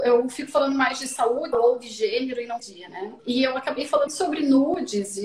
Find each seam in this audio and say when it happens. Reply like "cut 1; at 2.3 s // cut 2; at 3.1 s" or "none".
cut 1; at 1.5 s // cut 2; at 2.6 s // cut 3; at 3.2 s // cut 4; at 4.1 s